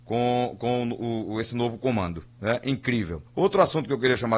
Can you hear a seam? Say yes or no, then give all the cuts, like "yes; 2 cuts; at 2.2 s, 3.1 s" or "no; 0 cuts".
yes; 2 cuts; at 2.3 s, 3.3 s